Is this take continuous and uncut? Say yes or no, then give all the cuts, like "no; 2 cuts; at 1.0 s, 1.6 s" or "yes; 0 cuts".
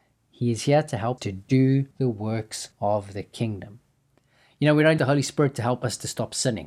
no; 4 cuts; at 1.2 s, 1.9 s, 2.7 s, 5.0 s